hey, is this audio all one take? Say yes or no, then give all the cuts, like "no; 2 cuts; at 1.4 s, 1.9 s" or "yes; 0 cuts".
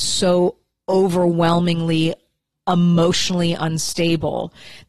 yes; 0 cuts